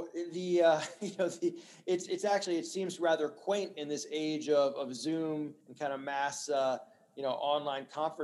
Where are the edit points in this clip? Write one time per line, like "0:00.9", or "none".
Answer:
0:05.6